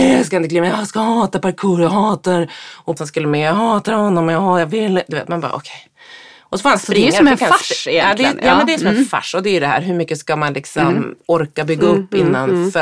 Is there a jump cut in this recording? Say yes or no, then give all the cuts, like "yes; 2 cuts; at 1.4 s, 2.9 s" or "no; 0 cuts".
yes; 1 cut; at 3.0 s